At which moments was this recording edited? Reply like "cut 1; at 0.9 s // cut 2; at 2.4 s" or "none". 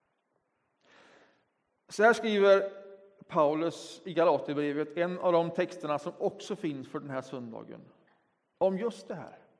none